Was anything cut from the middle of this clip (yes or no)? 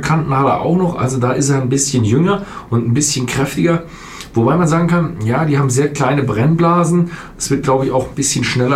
no